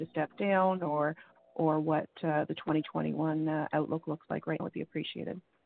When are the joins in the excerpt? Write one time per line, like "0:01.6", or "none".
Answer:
0:04.6